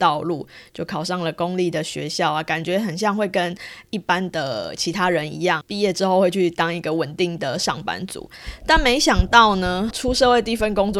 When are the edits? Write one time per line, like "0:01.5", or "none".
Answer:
0:05.6
0:09.9